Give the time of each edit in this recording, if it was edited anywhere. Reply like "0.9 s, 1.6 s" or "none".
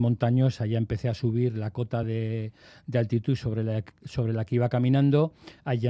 none